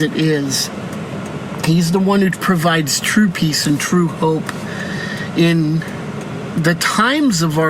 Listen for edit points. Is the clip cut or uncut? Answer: uncut